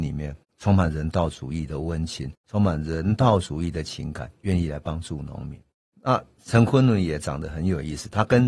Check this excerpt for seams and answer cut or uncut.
uncut